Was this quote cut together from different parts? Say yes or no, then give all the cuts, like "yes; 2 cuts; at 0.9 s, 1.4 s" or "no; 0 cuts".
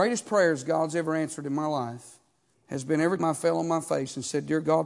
yes; 2 cuts; at 2.5 s, 3.2 s